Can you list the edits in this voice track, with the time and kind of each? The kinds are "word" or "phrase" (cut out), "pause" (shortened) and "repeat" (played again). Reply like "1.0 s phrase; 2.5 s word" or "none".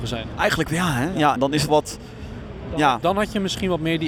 1.4 s word; 1.7 s word; 3.0 s word